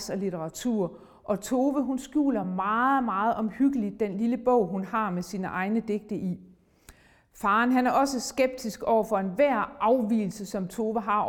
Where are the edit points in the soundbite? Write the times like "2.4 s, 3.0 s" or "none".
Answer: none